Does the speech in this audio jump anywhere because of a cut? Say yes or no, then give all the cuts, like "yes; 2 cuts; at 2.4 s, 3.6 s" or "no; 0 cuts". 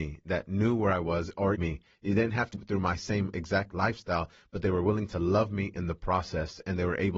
yes; 2 cuts; at 1.5 s, 2.5 s